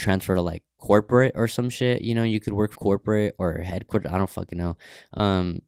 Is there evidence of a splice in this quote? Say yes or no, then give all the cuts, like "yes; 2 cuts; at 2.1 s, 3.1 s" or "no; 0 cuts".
yes; 1 cut; at 2.8 s